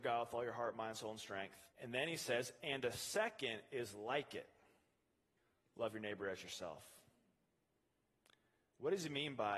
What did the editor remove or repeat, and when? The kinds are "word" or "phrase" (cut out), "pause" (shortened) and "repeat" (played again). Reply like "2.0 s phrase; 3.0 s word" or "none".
1.7 s pause; 5.4 s pause